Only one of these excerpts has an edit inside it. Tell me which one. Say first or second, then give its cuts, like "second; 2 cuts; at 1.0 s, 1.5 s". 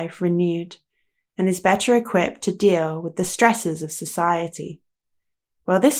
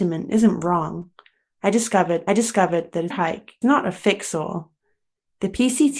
second; 3 cuts; at 2.3 s, 3.1 s, 3.6 s